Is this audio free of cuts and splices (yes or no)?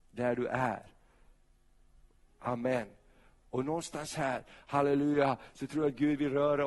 yes